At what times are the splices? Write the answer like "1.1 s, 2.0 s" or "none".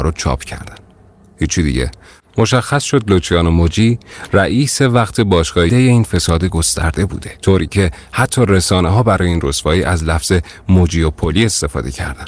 5.7 s, 7.4 s

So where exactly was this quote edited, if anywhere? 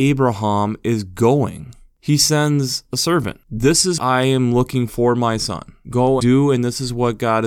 4.0 s, 4.9 s, 6.2 s

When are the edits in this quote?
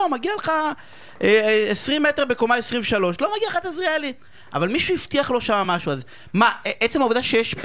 none

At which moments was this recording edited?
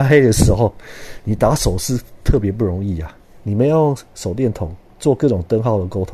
none

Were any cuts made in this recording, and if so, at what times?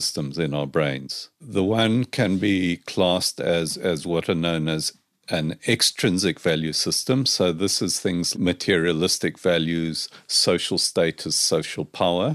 8.3 s

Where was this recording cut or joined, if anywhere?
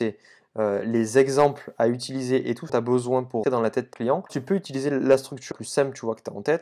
2.7 s, 3.4 s, 3.9 s, 4.3 s, 5.5 s

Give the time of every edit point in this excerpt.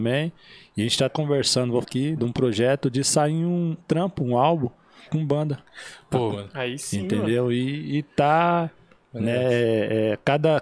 1.1 s, 1.8 s, 2.2 s, 3.8 s, 5.0 s, 6.3 s

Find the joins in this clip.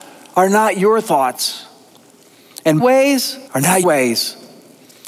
2.8 s, 3.5 s, 3.8 s

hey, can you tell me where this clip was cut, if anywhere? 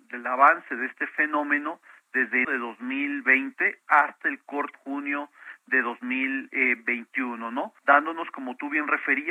2.4 s, 4.7 s, 7.8 s

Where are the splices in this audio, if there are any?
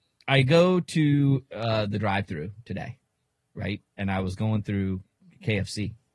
3.9 s

